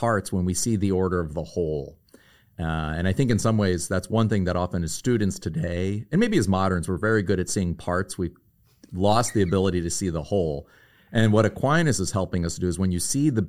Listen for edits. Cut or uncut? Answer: uncut